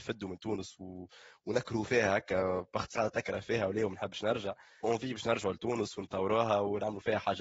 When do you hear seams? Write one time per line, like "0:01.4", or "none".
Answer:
0:02.9
0:04.8